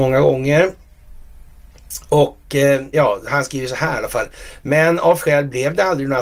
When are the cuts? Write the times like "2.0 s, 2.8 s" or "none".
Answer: 2.9 s, 5.2 s